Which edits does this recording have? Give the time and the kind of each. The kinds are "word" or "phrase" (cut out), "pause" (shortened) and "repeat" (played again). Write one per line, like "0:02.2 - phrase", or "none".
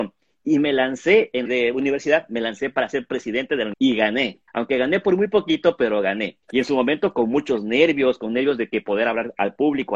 0:01.5 - phrase
0:03.7 - word
0:04.5 - pause
0:06.4 - pause